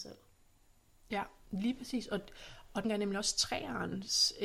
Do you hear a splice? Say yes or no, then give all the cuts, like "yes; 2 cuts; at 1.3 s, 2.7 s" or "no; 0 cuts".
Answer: yes; 1 cut; at 2.8 s